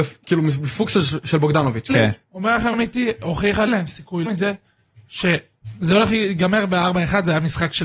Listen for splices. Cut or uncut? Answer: cut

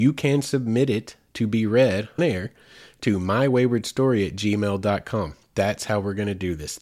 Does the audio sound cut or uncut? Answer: cut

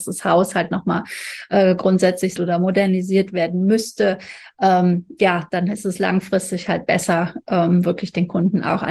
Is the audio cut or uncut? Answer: cut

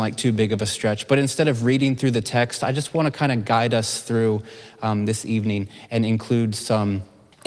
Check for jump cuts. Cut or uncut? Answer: uncut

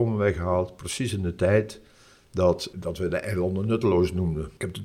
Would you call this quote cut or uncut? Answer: uncut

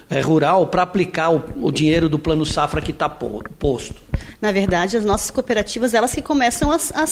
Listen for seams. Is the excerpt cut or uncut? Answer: uncut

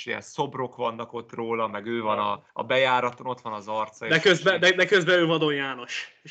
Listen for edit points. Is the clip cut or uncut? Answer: cut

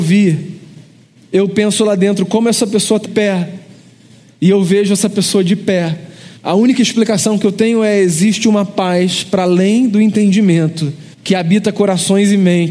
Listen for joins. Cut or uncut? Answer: cut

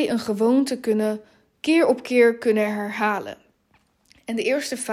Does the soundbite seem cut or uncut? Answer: uncut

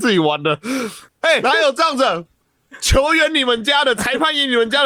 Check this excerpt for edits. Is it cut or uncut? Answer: cut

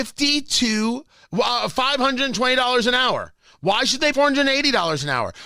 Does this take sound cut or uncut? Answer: cut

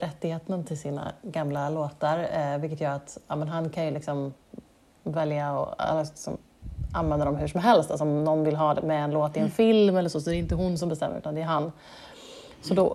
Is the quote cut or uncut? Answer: uncut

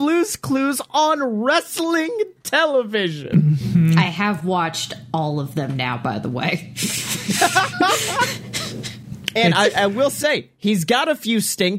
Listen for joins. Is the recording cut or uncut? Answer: uncut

